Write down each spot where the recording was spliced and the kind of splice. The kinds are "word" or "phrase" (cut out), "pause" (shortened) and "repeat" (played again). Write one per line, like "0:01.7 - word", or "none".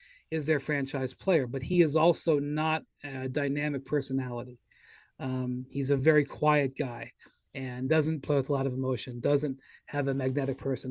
none